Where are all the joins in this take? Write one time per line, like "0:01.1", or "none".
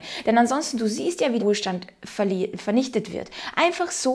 0:01.4